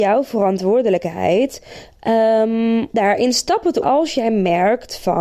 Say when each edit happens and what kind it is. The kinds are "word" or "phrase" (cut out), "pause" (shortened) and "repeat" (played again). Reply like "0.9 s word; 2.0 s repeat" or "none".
2.9 s word; 3.8 s word